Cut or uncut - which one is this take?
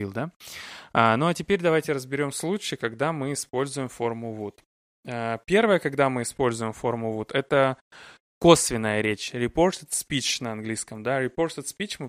uncut